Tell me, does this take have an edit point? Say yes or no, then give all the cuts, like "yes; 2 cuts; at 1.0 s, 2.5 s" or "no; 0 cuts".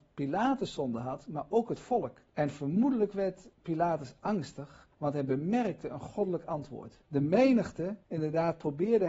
yes; 5 cuts; at 2.3 s, 3.5 s, 4.9 s, 7.0 s, 8.0 s